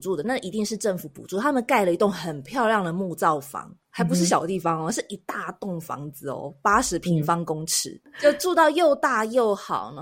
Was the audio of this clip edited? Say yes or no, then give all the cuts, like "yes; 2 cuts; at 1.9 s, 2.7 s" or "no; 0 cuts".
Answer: yes; 1 cut; at 3.8 s